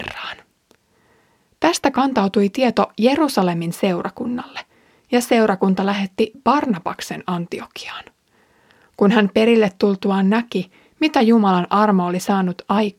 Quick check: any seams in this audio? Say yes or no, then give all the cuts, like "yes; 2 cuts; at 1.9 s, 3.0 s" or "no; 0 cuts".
no; 0 cuts